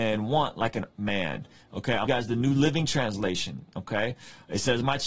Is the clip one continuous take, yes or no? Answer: no